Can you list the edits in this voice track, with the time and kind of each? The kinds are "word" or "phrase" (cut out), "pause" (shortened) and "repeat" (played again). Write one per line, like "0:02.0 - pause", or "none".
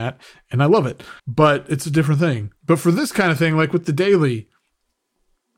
0:01.2 - pause
0:02.6 - pause